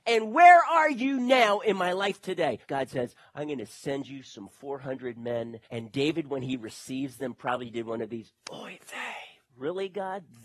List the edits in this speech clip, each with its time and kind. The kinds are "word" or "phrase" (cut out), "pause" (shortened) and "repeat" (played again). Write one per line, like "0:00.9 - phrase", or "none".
0:02.6 - pause
0:05.6 - pause